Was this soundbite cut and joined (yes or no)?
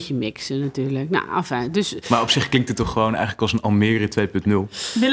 no